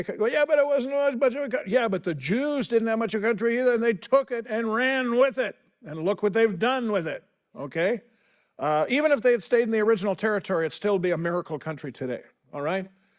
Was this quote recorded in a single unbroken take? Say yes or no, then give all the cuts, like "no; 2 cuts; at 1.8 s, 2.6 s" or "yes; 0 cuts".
yes; 0 cuts